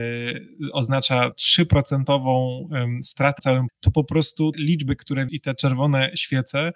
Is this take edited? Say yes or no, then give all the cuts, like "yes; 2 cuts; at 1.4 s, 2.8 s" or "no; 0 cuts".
yes; 5 cuts; at 1.3 s, 3.4 s, 3.7 s, 4.5 s, 5.3 s